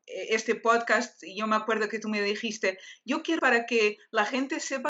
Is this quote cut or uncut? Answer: cut